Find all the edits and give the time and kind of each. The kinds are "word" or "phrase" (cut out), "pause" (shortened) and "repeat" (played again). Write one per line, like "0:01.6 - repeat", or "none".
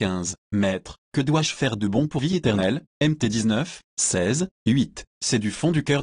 0:02.2 - phrase